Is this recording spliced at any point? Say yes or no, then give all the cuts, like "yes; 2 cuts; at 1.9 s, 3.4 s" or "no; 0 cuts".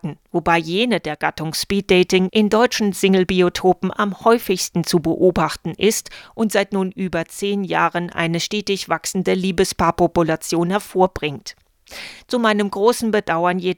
no; 0 cuts